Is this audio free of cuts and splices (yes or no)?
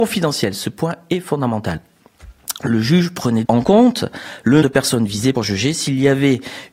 no